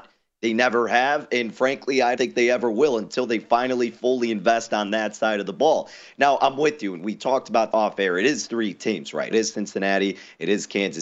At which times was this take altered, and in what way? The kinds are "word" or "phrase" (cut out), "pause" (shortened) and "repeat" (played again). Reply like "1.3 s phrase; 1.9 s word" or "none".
2.2 s word; 7.7 s word; 9.3 s word